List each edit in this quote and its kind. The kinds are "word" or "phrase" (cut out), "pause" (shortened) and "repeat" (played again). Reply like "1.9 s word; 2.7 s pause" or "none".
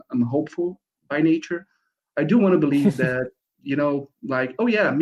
1.0 s word

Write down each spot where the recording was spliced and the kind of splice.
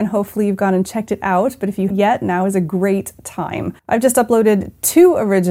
1.9 s word; 3.8 s pause

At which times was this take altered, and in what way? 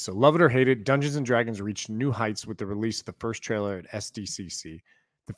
none

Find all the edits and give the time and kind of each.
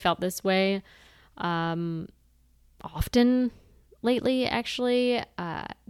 none

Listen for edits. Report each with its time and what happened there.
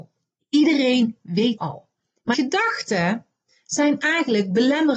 1.6 s word; 2.3 s word

